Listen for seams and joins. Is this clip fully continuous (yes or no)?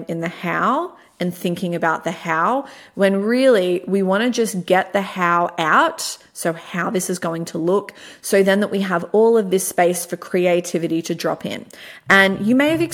yes